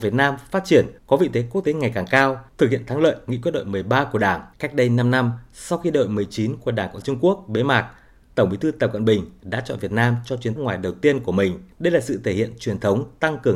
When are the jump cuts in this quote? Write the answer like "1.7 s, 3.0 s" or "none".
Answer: 1.0 s, 2.5 s, 4.5 s, 7.0 s, 10.6 s, 11.7 s